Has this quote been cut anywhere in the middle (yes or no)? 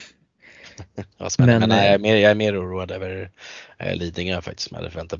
no